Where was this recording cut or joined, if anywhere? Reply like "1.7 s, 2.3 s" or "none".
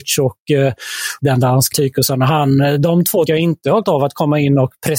1.2 s, 1.7 s, 3.3 s, 3.8 s